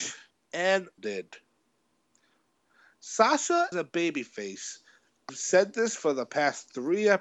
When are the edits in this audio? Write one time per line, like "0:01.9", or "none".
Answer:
0:01.0
0:03.7
0:05.3